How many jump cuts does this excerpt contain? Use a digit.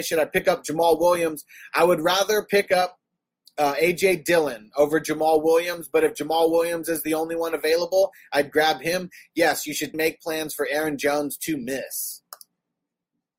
1